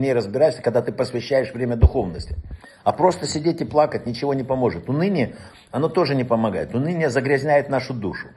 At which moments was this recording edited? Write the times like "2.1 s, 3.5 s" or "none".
none